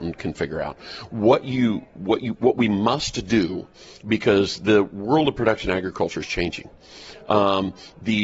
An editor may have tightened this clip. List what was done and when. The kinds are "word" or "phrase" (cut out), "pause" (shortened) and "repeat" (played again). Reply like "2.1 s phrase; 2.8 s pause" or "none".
none